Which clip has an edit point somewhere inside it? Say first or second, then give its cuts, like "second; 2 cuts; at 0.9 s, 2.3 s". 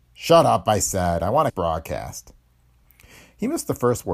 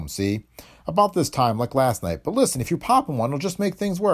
first; 1 cut; at 1.5 s